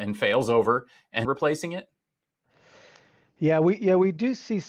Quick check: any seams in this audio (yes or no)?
yes